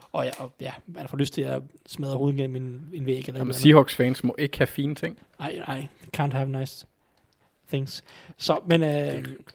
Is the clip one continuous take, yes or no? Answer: yes